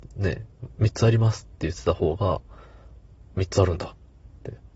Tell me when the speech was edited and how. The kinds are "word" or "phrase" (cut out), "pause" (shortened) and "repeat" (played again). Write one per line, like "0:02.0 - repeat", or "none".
0:03.3 - word